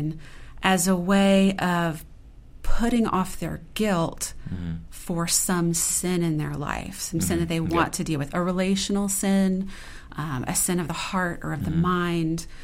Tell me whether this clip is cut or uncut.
uncut